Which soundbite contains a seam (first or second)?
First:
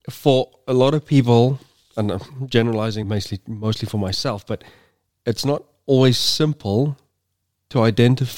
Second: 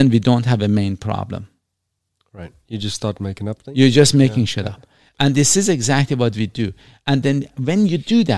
first